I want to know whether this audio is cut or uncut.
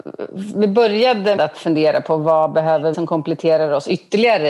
cut